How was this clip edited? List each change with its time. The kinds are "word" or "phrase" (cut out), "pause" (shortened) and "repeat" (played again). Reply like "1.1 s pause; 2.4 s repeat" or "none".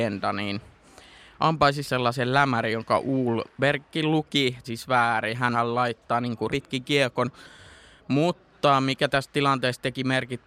1.8 s word; 4.6 s word; 5.5 s phrase; 6.5 s word